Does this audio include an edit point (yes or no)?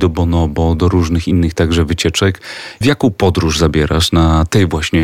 no